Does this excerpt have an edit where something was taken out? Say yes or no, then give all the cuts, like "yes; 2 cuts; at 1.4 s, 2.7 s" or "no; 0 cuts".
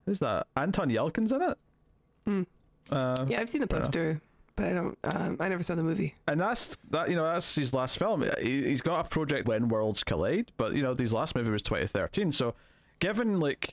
yes; 3 cuts; at 2.1 s, 3.3 s, 9.4 s